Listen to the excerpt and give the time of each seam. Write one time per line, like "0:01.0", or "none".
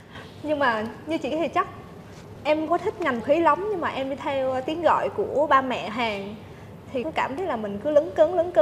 0:01.3
0:02.4
0:02.7
0:03.2
0:05.9
0:07.0
0:07.4